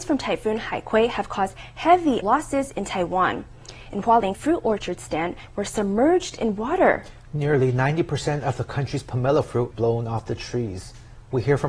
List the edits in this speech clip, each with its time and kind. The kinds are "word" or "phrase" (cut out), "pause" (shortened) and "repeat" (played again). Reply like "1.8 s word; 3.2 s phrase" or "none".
2.2 s word; 4.3 s word; 9.7 s phrase